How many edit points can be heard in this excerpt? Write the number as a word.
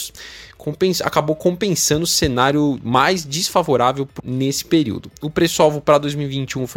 one